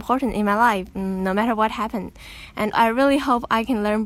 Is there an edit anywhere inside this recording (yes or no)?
yes